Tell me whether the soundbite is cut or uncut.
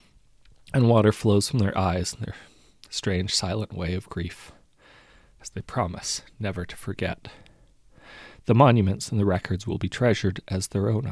uncut